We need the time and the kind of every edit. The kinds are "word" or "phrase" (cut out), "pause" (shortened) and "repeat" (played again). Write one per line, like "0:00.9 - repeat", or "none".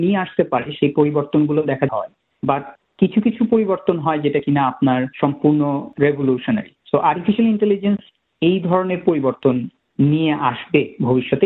0:01.9 - phrase
0:05.1 - pause
0:06.8 - pause